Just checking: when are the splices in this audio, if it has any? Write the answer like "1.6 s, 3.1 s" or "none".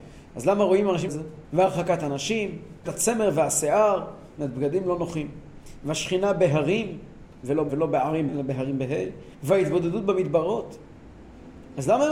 1.1 s, 1.4 s, 2.9 s, 4.3 s, 7.7 s, 8.3 s, 9.3 s